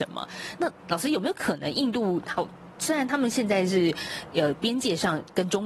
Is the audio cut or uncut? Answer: uncut